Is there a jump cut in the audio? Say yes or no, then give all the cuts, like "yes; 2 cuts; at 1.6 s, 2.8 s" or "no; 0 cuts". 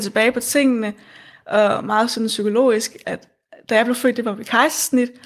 yes; 1 cut; at 3.0 s